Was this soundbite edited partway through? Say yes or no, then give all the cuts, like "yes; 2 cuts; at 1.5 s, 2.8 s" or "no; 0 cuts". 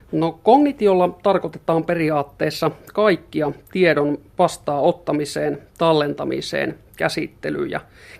no; 0 cuts